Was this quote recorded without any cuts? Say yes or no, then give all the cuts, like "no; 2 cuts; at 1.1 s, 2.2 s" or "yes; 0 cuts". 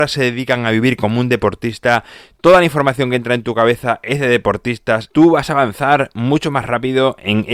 yes; 0 cuts